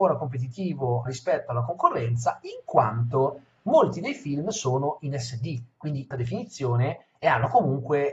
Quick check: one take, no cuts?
no; 2 cuts; at 1.1 s, 6.1 s

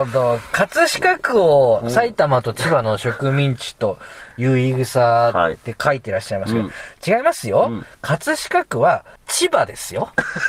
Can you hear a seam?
yes; 1 cut; at 9.2 s

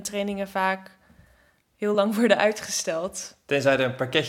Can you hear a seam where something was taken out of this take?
no; 0 cuts

